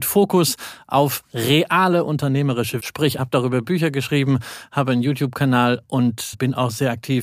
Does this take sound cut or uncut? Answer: cut